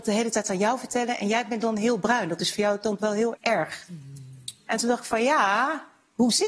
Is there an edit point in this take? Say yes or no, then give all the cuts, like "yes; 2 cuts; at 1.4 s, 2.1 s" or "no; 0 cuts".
yes; 2 cuts; at 3.0 s, 3.4 s